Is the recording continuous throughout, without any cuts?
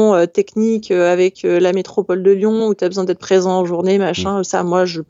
yes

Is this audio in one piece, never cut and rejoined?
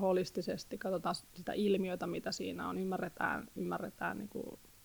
yes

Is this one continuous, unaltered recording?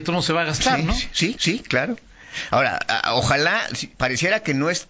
no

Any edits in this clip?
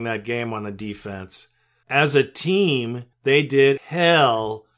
yes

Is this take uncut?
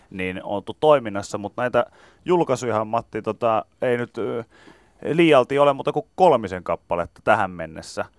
yes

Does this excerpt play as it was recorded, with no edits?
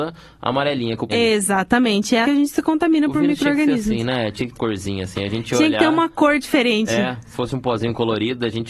no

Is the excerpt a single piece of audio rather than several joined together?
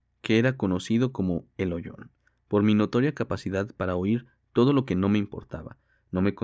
yes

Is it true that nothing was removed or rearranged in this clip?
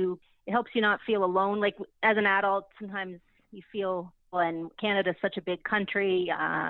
yes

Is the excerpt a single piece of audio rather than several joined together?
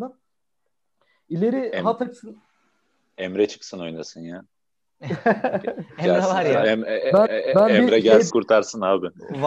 no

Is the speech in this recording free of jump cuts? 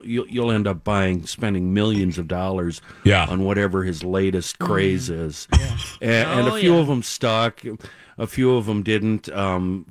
yes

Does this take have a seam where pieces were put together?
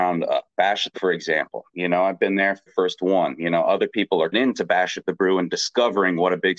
yes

